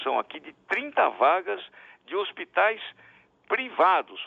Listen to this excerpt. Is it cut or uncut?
uncut